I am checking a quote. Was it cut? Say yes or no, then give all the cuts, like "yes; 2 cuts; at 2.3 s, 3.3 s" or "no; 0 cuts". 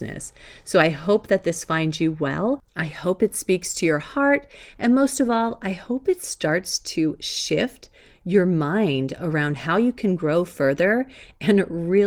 no; 0 cuts